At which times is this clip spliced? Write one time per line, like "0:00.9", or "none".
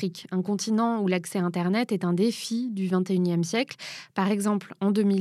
none